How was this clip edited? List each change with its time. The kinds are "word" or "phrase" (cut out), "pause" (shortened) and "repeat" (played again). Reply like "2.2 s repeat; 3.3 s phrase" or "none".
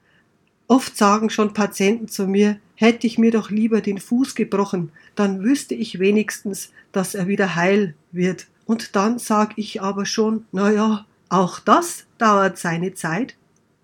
8.5 s pause